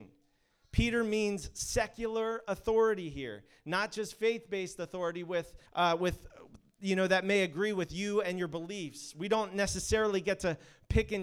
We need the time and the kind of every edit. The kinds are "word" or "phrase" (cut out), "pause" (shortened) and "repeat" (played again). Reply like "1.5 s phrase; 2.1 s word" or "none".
5.7 s pause